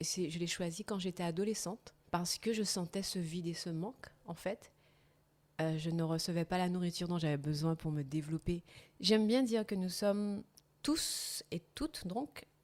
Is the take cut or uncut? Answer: cut